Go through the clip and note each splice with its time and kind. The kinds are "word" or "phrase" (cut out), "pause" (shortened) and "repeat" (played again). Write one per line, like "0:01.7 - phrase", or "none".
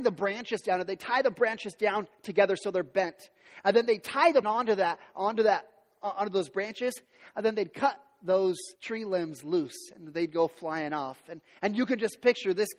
0:04.4 - word
0:08.8 - pause